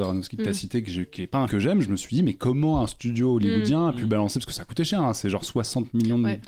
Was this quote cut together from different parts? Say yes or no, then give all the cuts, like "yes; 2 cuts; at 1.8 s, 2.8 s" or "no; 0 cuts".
yes; 1 cut; at 1.5 s